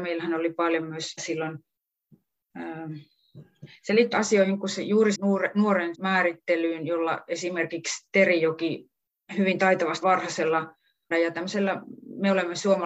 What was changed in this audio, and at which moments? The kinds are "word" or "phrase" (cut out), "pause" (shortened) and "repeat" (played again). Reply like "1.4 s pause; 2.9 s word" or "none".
1.2 s word; 4.1 s word; 5.1 s word; 5.9 s word; 10.0 s word; 11.1 s word